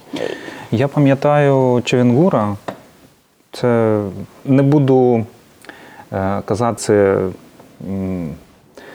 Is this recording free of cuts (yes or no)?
no